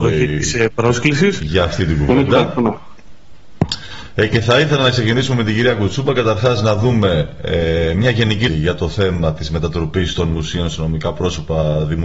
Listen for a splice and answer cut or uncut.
cut